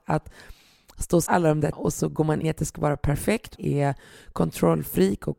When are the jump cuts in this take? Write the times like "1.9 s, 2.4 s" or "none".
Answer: 1.3 s, 1.7 s, 2.4 s, 3.6 s